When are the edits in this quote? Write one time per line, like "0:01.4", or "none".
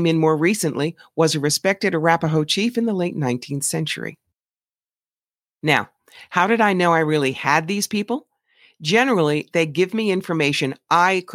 none